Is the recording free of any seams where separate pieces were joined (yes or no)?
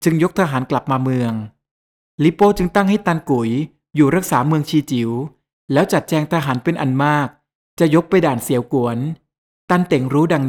yes